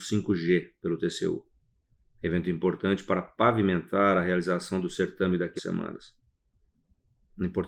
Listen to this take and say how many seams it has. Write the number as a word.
one